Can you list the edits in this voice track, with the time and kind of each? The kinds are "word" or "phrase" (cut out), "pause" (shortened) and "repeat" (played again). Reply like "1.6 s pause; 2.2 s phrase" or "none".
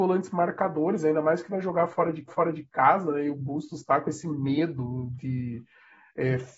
2.3 s repeat